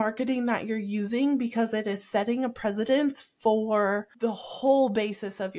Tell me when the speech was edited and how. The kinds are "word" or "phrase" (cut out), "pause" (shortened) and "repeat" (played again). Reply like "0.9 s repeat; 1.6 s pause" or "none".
4.1 s pause